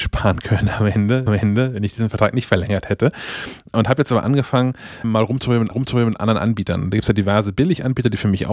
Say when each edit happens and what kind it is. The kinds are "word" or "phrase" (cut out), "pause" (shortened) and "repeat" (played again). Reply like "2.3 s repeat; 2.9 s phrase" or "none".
1.3 s repeat; 5.0 s word; 5.7 s repeat